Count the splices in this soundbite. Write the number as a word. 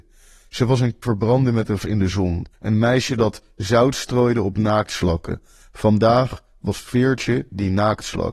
three